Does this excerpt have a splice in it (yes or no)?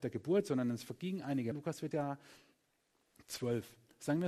yes